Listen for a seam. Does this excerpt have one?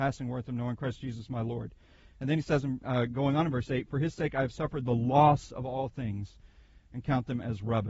no; 0 cuts

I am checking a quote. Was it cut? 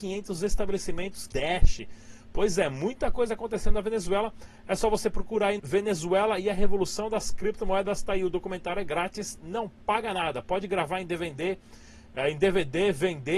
yes; 2 cuts; at 1.3 s, 5.6 s

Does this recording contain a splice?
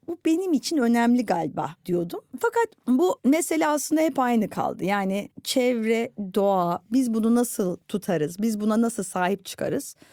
no; 0 cuts

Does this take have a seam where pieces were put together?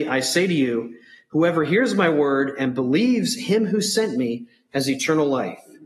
no; 0 cuts

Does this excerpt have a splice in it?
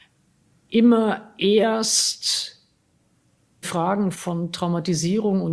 yes; 2 cuts; at 3.6 s, 4.1 s

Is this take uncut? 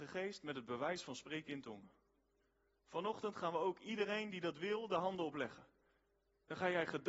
yes; 0 cuts

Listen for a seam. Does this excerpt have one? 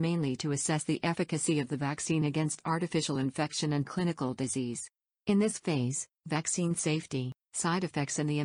no; 0 cuts

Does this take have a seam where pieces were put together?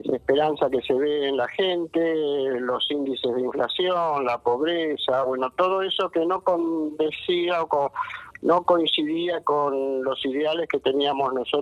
no; 0 cuts

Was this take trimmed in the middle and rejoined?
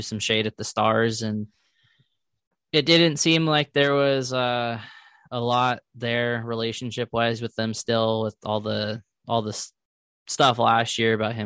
no; 0 cuts

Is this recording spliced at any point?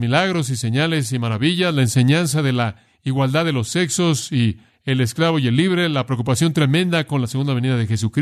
no; 0 cuts

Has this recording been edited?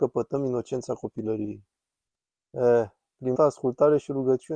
yes; 1 cut; at 3.3 s

